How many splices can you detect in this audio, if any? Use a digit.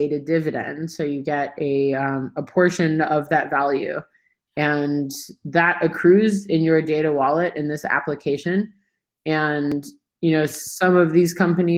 0